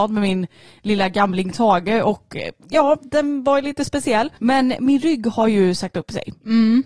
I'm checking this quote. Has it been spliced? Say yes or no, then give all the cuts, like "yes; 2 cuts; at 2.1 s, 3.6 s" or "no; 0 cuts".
yes; 1 cut; at 4.4 s